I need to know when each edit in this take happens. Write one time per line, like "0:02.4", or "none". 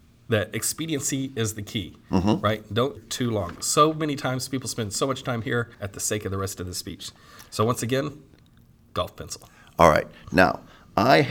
0:03.0
0:05.7